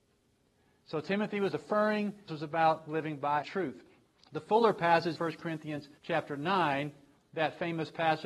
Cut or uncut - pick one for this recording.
cut